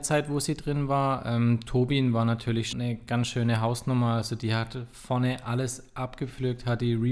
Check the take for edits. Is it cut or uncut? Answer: cut